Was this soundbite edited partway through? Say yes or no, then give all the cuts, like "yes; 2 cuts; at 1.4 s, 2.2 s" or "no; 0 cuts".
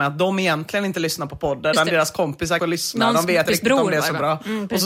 yes; 3 cuts; at 1.7 s, 2.6 s, 3.5 s